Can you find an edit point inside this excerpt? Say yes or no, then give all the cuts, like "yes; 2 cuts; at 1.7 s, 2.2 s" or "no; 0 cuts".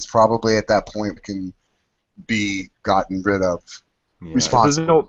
yes; 2 cuts; at 1.2 s, 2.7 s